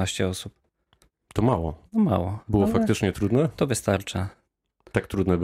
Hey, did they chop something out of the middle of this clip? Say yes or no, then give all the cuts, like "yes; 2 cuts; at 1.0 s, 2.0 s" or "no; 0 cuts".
yes; 2 cuts; at 1.9 s, 3.1 s